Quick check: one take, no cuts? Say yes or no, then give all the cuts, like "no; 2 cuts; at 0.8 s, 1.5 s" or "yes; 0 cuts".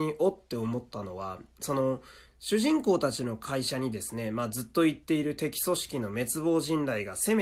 yes; 0 cuts